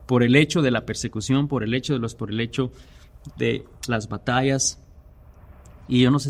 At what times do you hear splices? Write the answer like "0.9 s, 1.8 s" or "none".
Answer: 2.2 s